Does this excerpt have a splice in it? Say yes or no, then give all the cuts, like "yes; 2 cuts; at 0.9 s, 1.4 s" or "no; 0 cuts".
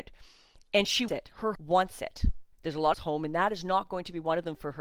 yes; 4 cuts; at 1.1 s, 1.5 s, 2.5 s, 2.9 s